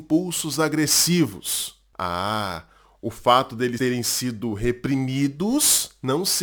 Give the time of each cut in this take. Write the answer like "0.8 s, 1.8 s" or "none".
3.8 s